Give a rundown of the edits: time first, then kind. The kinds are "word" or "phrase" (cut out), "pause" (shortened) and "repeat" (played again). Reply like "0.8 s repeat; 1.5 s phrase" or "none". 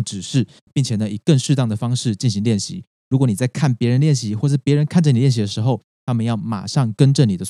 none